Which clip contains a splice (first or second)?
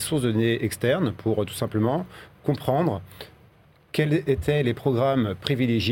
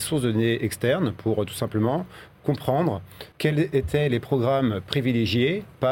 second